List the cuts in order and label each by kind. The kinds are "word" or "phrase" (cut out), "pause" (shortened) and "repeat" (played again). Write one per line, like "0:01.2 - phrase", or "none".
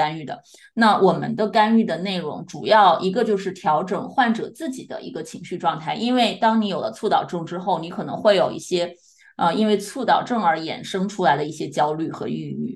none